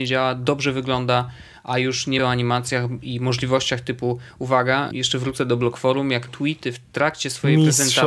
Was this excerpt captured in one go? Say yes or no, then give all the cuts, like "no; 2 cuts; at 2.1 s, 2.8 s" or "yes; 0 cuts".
no; 3 cuts; at 2.2 s, 4.9 s, 6.3 s